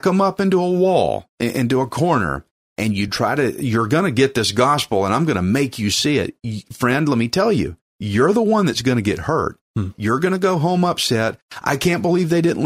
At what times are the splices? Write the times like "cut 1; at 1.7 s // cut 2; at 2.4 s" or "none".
none